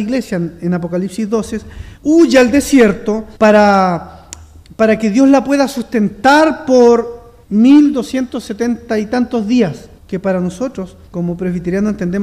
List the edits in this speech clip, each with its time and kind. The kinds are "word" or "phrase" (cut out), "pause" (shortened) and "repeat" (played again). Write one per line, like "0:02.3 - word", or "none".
0:02.0 - pause
0:03.4 - pause
0:07.4 - pause
0:10.0 - pause
0:11.1 - pause

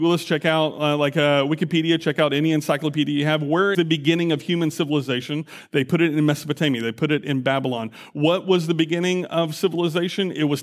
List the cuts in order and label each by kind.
0:03.7 - word

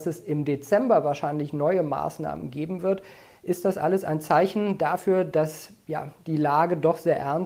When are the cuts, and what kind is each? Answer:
none

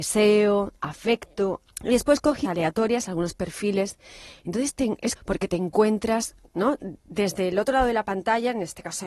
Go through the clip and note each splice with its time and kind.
0:01.7 - word
0:02.4 - word
0:05.2 - word

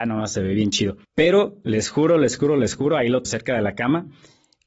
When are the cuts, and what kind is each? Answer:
0:01.0 - pause
0:03.2 - word

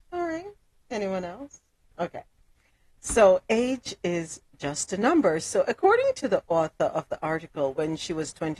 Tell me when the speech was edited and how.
0:01.8 - pause

